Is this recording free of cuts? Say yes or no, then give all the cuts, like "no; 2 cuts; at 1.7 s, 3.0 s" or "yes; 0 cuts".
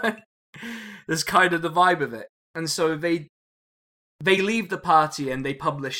yes; 0 cuts